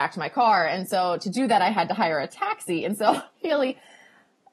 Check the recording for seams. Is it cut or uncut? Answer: uncut